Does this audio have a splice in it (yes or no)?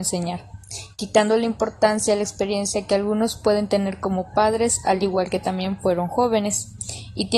no